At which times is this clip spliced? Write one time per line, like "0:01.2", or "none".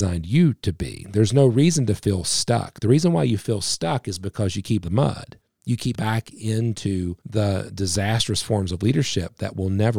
0:04.8
0:05.4
0:05.9
0:07.2